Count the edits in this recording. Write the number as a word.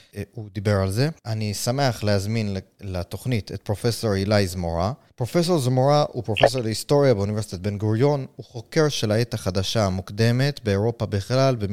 two